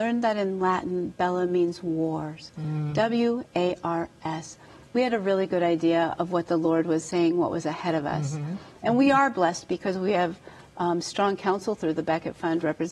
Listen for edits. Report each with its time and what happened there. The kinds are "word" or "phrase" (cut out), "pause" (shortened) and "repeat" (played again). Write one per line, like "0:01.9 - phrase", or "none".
none